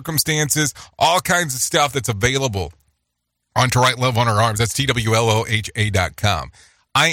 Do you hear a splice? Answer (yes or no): no